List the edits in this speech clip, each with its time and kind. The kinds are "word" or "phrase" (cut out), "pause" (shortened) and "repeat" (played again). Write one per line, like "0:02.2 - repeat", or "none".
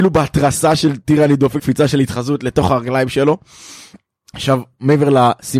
0:01.6 - word